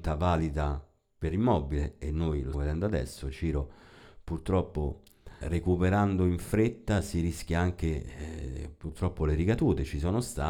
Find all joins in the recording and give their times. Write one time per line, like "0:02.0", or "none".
0:02.5
0:05.4

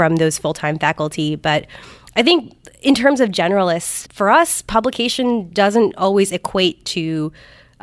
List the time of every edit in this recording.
0:04.1

